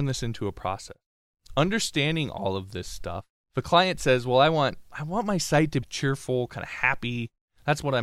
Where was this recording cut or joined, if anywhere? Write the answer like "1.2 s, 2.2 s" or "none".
3.3 s, 5.8 s

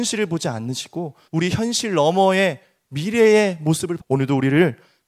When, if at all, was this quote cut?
1.2 s, 4.0 s

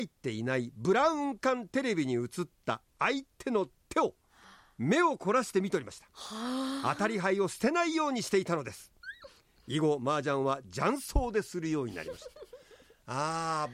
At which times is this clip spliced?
none

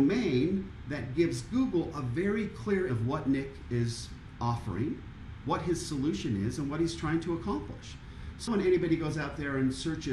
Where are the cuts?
2.9 s, 3.6 s, 8.5 s

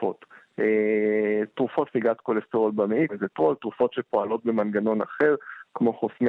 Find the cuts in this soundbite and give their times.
1.9 s, 3.1 s

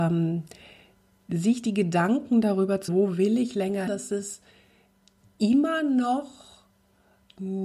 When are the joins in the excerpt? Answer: 2.9 s, 3.9 s

